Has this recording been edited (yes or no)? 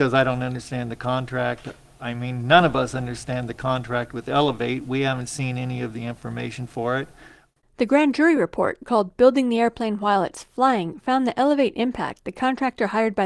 no